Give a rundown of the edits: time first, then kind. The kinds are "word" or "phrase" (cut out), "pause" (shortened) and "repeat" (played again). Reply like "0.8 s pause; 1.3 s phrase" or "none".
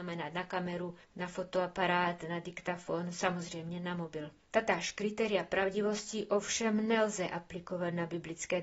1.0 s pause; 4.5 s pause